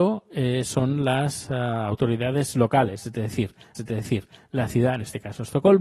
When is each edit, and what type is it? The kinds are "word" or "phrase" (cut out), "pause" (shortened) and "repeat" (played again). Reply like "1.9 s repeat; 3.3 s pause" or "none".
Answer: 3.7 s repeat